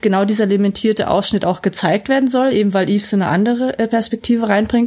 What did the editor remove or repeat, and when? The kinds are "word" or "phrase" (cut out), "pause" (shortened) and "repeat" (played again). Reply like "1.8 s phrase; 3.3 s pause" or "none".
none